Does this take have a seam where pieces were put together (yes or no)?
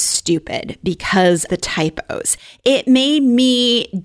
yes